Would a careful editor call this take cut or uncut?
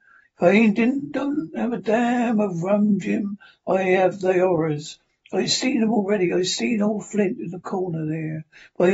uncut